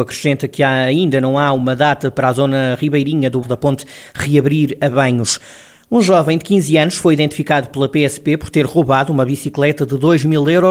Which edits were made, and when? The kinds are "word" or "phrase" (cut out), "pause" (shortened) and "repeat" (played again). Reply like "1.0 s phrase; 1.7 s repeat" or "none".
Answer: 3.4 s word